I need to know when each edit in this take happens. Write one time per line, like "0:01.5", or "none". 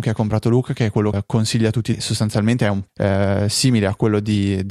0:01.1
0:01.9
0:02.9